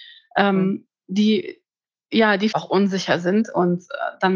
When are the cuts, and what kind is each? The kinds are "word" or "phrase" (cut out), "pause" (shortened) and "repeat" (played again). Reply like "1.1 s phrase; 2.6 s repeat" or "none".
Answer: 2.5 s word